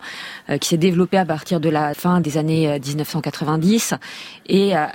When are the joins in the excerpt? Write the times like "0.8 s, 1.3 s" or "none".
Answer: 1.9 s, 2.2 s